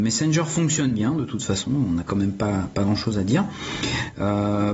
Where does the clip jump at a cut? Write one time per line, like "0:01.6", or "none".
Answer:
none